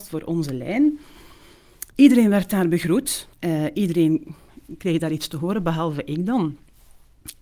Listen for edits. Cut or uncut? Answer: cut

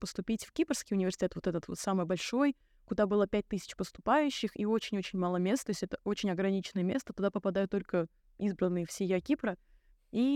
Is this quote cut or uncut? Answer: uncut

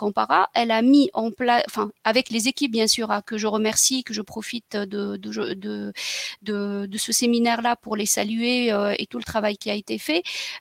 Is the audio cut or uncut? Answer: uncut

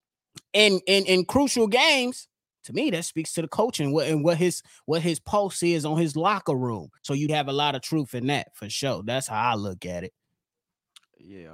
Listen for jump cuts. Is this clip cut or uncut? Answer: cut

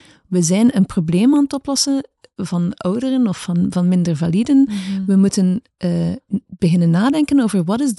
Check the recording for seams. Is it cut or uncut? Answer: uncut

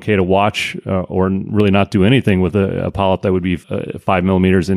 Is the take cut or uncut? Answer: cut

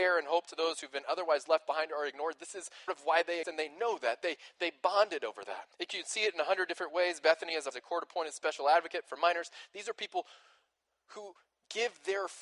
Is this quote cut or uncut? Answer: cut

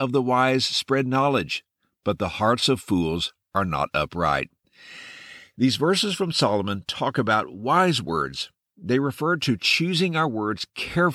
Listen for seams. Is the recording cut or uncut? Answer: uncut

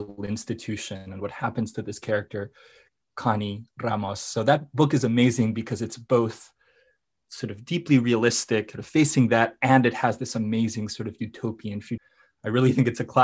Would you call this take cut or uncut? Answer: cut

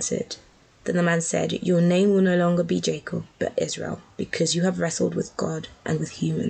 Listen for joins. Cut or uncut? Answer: cut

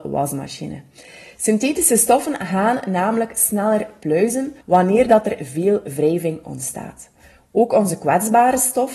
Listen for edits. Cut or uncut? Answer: cut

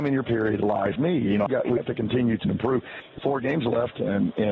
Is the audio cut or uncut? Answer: cut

